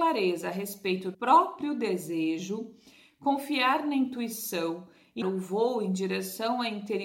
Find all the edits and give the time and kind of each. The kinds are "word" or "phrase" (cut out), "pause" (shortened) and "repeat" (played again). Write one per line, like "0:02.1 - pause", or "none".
0:01.1 - word
0:05.2 - word

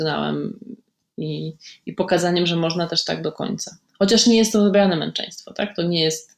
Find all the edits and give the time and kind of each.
none

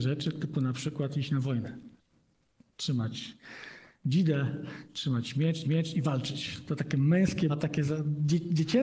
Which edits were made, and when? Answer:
0:05.6 - repeat
0:07.5 - word

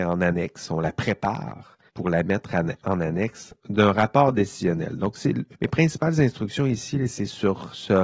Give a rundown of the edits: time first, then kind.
0:01.9 - pause
0:05.5 - pause

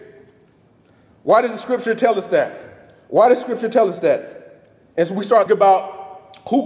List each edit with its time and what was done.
0:05.5 - word

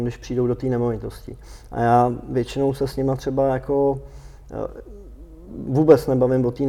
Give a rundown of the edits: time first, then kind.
none

